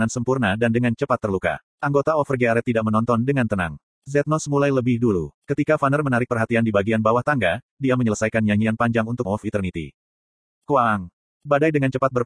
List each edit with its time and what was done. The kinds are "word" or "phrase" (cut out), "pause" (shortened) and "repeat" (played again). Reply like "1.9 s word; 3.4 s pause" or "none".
1.7 s pause; 9.2 s word